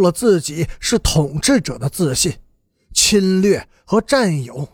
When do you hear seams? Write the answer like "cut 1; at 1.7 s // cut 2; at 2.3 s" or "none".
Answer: none